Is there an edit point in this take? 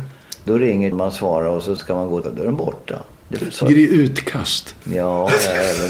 yes; 6 cuts; at 0.9 s, 1.8 s, 2.2 s, 3.2 s, 3.6 s, 4.8 s

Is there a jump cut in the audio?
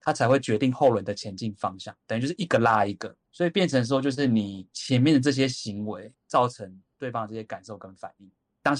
yes; 2 cuts; at 3.2 s, 6.1 s

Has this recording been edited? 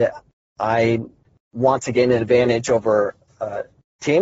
no; 0 cuts

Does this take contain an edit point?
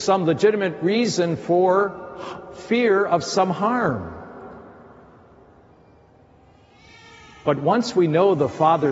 no; 0 cuts

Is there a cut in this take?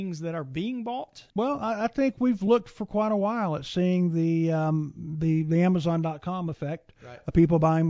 yes; 1 cut; at 1.3 s

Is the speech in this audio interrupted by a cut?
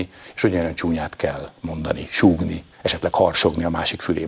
yes; 1 cut; at 2.7 s

